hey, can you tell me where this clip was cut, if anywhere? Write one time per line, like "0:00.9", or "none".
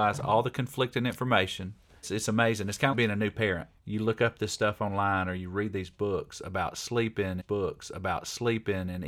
0:02.0
0:02.9
0:03.8
0:07.4